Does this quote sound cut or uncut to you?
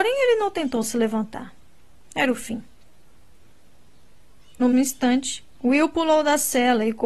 cut